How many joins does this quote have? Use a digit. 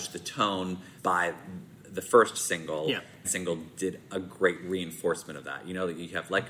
2